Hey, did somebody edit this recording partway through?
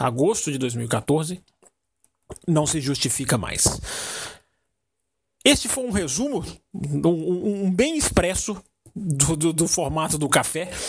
no; 0 cuts

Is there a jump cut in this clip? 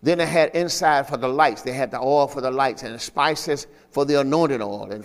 no; 0 cuts

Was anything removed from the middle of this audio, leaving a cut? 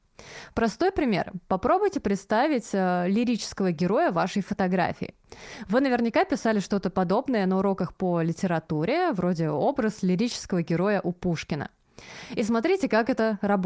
no; 0 cuts

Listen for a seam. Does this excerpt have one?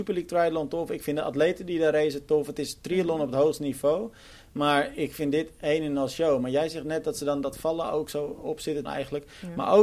yes; 1 cut; at 8.9 s

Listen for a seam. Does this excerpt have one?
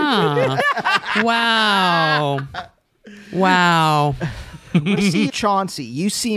yes; 2 cuts; at 5.0 s, 5.3 s

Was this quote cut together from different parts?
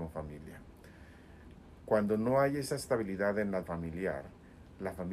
yes; 1 cut; at 3.6 s

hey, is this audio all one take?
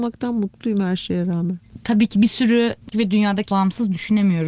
no; 3 cuts; at 2.2 s, 2.9 s, 3.5 s

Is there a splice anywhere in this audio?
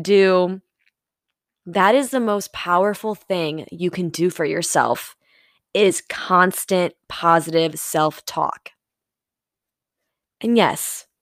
no; 0 cuts

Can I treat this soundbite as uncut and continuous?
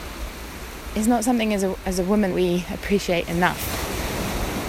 no; 1 cut; at 2.3 s

